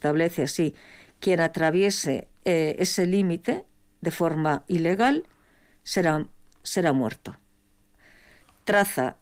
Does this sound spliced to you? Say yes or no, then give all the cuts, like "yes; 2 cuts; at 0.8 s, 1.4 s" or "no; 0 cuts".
no; 0 cuts